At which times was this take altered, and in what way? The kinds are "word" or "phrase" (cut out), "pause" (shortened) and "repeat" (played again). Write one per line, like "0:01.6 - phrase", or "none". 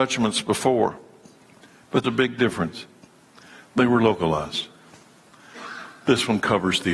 0:02.0 - word